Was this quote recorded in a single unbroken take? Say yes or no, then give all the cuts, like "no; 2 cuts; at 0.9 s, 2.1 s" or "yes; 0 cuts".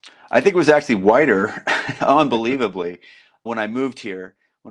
no; 1 cut; at 3.5 s